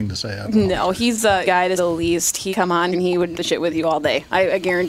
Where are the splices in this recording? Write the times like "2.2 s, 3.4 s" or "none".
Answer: 1.4 s, 1.8 s, 2.5 s, 2.9 s, 3.3 s